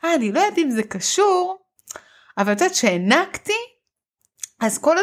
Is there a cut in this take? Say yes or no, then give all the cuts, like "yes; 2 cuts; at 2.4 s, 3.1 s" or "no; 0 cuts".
no; 0 cuts